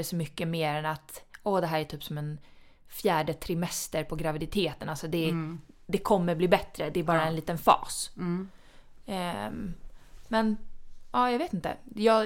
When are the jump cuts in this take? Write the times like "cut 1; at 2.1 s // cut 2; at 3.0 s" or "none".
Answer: none